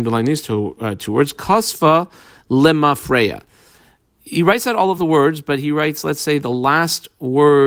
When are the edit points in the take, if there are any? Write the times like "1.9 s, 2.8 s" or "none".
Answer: none